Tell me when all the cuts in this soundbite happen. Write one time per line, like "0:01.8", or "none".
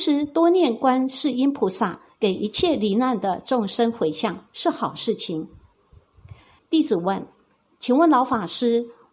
0:06.6